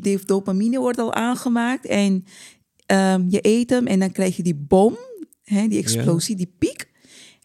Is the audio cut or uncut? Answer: uncut